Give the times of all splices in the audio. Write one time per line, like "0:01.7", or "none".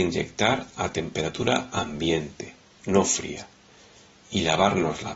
none